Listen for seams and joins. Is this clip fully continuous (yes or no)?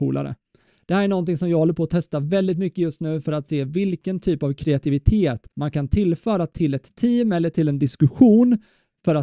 no